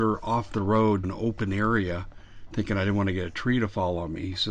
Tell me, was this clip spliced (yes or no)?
yes